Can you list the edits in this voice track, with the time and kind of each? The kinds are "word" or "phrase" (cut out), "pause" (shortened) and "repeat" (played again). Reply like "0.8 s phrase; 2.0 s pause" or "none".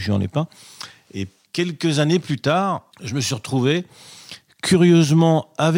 1.5 s word; 2.9 s pause